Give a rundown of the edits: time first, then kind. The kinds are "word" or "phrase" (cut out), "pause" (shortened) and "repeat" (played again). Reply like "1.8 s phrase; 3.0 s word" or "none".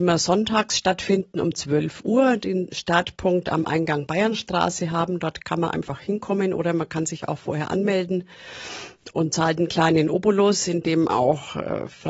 none